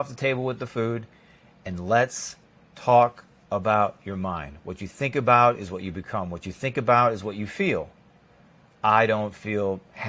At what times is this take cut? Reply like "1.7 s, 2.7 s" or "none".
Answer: none